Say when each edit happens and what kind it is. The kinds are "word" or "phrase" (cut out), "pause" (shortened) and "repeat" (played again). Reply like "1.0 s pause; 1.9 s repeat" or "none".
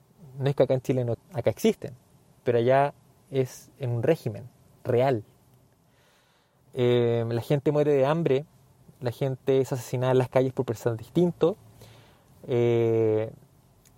1.1 s word